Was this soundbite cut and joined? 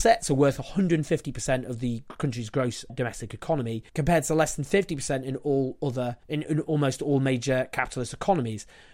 yes; 3 cuts; at 2.9 s, 3.9 s, 6.2 s

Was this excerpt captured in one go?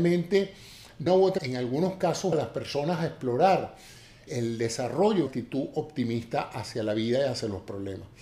no; 5 cuts; at 1.1 s, 1.4 s, 2.3 s, 4.3 s, 5.3 s

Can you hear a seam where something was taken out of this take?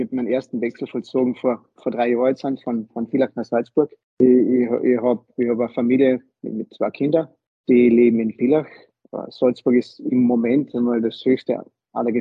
no; 0 cuts

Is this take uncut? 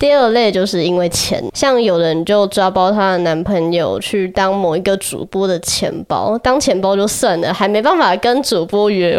no; 1 cut; at 1.5 s

